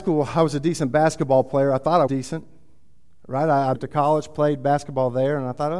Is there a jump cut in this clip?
yes; 2 cuts; at 2.1 s, 3.7 s

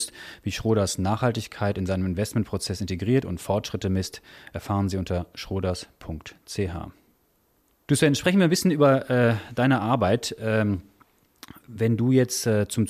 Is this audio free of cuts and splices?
yes; 0 cuts

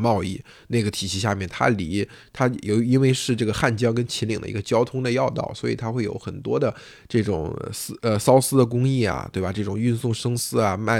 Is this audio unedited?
yes; 0 cuts

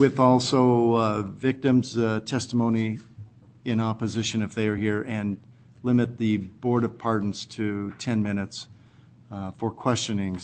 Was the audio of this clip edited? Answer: no; 0 cuts

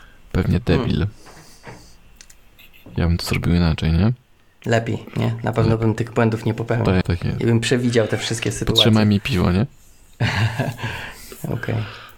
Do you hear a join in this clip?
yes; 2 cuts; at 4.4 s, 7.0 s

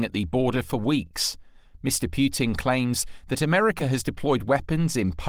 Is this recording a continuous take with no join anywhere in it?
yes; 0 cuts

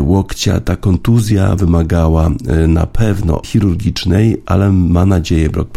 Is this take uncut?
no; 2 cuts; at 1.6 s, 3.4 s

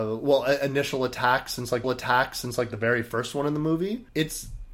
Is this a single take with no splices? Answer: no; 1 cut; at 1.8 s

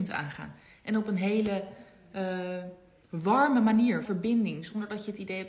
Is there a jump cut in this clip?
yes; 1 cut; at 4.0 s

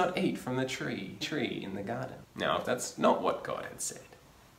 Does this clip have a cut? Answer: yes; 3 cuts; at 1.2 s, 2.2 s, 2.6 s

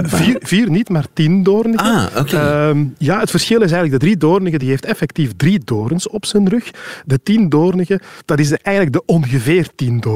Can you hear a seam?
no; 0 cuts

